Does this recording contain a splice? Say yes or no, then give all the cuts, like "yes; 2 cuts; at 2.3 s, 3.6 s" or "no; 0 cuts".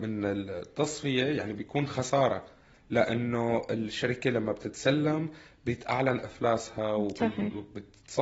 no; 0 cuts